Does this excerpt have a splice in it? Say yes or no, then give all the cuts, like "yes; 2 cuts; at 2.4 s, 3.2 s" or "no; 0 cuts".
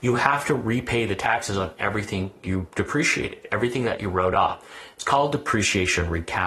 no; 0 cuts